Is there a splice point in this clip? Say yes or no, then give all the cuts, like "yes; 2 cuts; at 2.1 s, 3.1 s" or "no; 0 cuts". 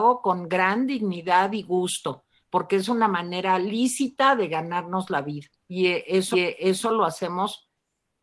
yes; 2 cuts; at 5.5 s, 6.3 s